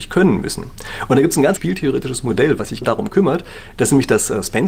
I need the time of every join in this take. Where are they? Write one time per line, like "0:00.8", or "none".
0:01.6
0:02.8